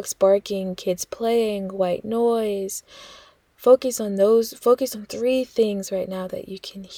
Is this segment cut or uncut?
uncut